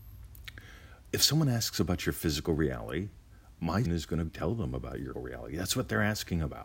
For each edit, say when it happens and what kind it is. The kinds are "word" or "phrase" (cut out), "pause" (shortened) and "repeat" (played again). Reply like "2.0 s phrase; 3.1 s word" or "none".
3.8 s word; 4.3 s word; 5.1 s word